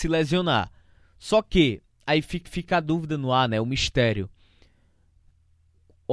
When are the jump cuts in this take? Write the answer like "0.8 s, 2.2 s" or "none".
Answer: 2.5 s